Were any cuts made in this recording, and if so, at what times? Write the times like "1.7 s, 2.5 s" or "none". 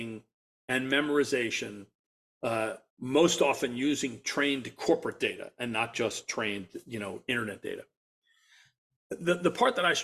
2.9 s